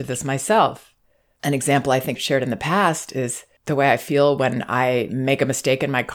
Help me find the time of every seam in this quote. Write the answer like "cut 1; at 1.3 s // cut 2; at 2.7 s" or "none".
cut 1; at 2.2 s